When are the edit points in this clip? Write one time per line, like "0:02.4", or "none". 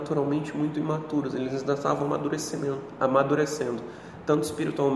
none